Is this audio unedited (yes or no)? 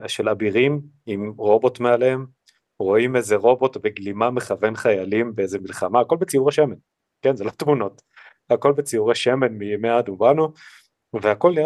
yes